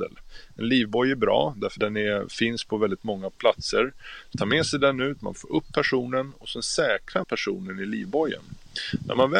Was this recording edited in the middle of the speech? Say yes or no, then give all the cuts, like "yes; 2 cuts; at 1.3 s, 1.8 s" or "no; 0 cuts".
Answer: yes; 5 cuts; at 1.8 s, 3.4 s, 4.3 s, 5.3 s, 7.2 s